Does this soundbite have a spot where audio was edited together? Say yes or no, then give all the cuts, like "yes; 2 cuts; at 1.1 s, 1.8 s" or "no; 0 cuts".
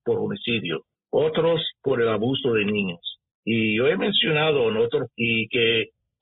yes; 3 cuts; at 0.9 s, 3.3 s, 5.1 s